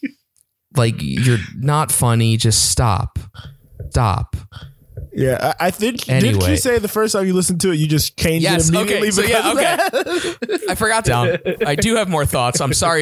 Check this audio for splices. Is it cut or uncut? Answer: cut